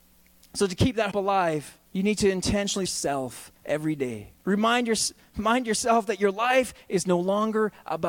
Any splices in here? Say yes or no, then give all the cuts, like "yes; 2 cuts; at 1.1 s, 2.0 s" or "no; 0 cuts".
yes; 5 cuts; at 1.1 s, 1.9 s, 2.9 s, 3.6 s, 4.4 s